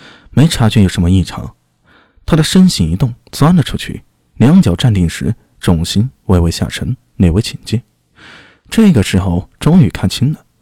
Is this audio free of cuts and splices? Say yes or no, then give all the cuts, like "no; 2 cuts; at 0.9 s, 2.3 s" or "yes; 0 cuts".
yes; 0 cuts